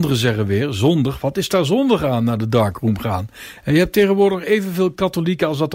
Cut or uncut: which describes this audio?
uncut